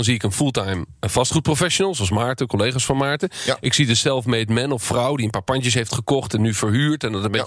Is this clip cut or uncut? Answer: uncut